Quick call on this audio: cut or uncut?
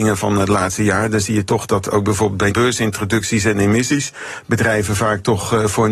cut